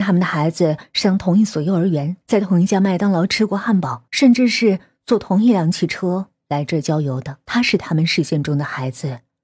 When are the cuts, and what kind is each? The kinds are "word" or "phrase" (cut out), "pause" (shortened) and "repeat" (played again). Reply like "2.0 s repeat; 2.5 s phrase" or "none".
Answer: 2.2 s pause; 4.1 s pause; 7.4 s pause